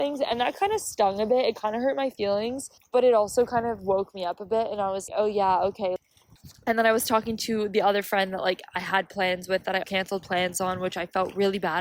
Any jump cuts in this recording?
yes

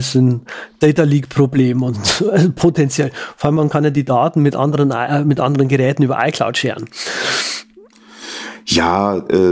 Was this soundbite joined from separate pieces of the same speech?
no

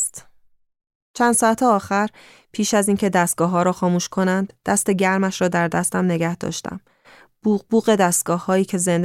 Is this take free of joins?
yes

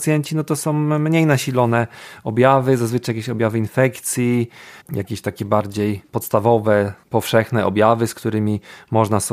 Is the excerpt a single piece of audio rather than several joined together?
no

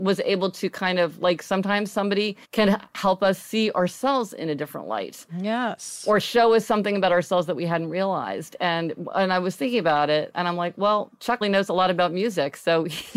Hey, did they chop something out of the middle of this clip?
yes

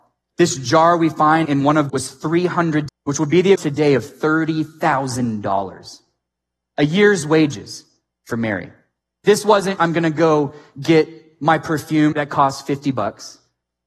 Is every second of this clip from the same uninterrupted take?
no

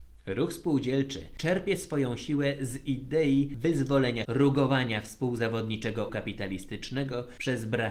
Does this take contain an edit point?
yes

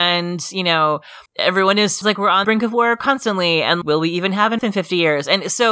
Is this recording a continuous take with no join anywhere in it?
no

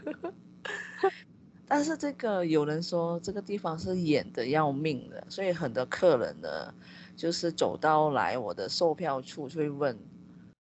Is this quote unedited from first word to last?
yes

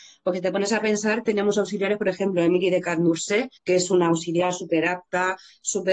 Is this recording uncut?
no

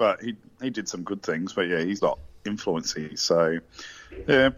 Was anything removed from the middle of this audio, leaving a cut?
yes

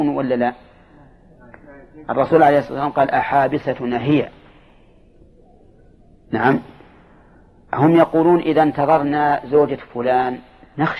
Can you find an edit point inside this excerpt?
no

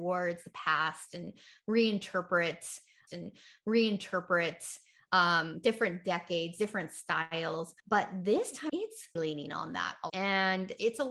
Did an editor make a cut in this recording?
yes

